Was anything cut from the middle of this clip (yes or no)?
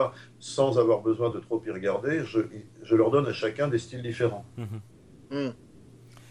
no